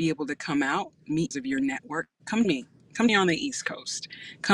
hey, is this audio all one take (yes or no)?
no